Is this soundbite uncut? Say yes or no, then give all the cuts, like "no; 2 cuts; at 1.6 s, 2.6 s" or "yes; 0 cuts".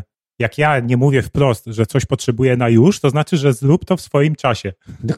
yes; 0 cuts